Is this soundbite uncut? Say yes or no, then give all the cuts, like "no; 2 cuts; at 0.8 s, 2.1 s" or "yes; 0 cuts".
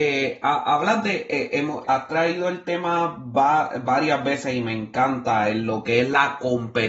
no; 1 cut; at 1.8 s